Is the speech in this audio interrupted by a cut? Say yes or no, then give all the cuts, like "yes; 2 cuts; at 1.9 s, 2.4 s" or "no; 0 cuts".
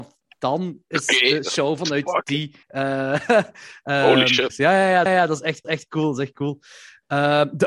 yes; 4 cuts; at 2.6 s, 4.5 s, 5.1 s, 5.6 s